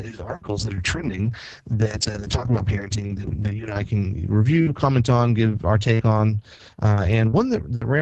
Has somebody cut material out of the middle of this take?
no; 0 cuts

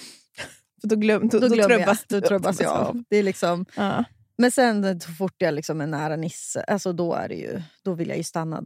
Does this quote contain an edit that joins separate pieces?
no; 0 cuts

